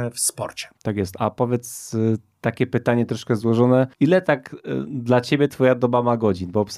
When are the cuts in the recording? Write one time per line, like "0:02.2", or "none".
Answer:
0:03.9